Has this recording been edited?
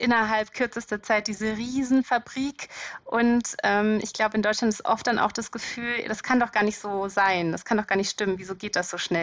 no; 0 cuts

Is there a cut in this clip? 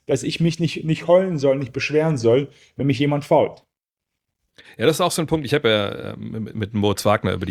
no; 0 cuts

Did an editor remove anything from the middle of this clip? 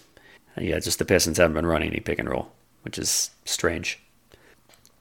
no; 0 cuts

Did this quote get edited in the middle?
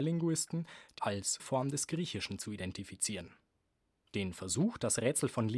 yes; 2 cuts; at 1.0 s, 1.4 s

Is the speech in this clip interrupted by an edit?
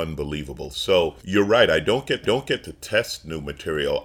yes; 2 cuts; at 1.2 s, 2.2 s

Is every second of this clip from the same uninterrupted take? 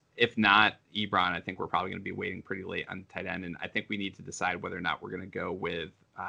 yes; 0 cuts

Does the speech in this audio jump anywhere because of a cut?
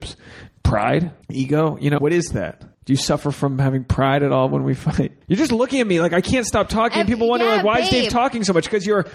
yes; 4 cuts; at 1.2 s, 2.0 s, 2.7 s, 5.2 s

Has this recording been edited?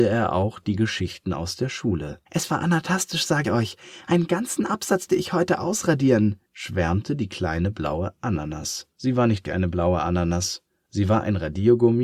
yes; 6 cuts; at 2.3 s, 3.4 s, 5.1 s, 6.5 s, 8.9 s, 9.5 s

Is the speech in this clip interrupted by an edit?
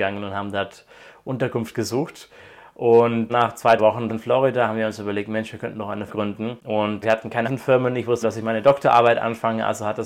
yes; 7 cuts; at 3.3 s, 3.8 s, 4.1 s, 6.1 s, 7.0 s, 7.4 s, 8.2 s

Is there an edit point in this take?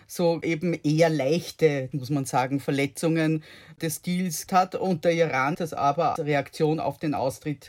yes; 4 cuts; at 1.9 s, 4.5 s, 5.5 s, 6.2 s

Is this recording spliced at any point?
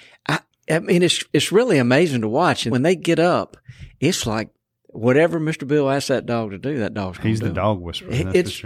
yes; 2 cuts; at 2.7 s, 4.7 s

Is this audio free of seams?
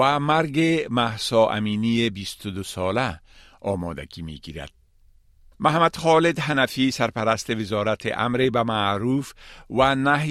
yes; 0 cuts

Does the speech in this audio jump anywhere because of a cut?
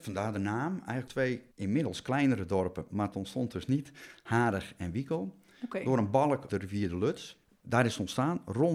yes; 4 cuts; at 1.1 s, 1.5 s, 3.1 s, 6.5 s

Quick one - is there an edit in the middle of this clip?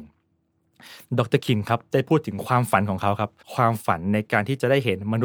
yes; 1 cut; at 3.4 s

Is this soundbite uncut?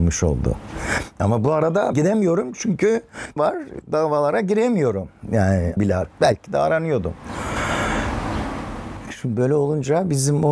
no; 4 cuts; at 1.9 s, 3.4 s, 5.8 s, 6.1 s

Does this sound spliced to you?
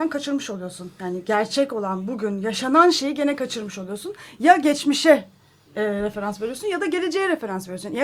no; 0 cuts

